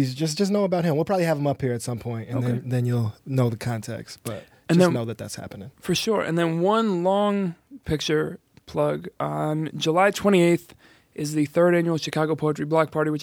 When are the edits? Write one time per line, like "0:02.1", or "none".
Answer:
none

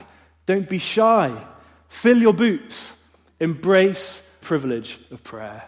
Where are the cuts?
0:04.4

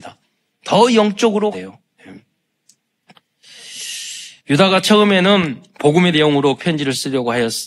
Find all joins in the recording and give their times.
0:01.5
0:04.4
0:06.1
0:06.6

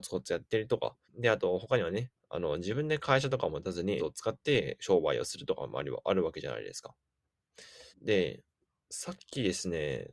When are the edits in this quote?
0:01.0
0:04.0
0:07.9

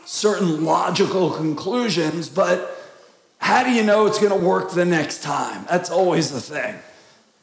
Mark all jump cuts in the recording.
none

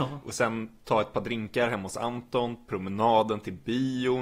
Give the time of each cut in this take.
none

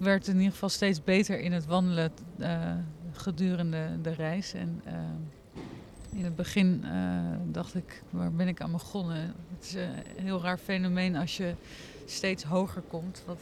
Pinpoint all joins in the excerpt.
none

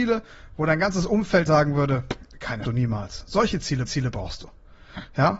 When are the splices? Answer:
0:01.5
0:02.6
0:03.9

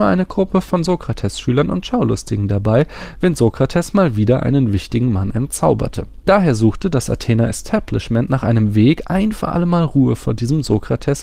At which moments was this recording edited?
none

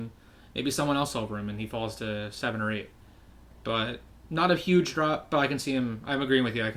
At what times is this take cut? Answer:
none

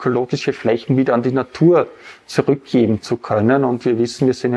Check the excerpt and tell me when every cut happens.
none

